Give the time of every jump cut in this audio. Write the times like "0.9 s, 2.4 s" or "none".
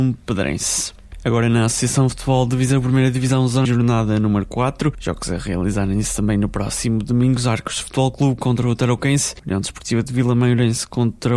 3.7 s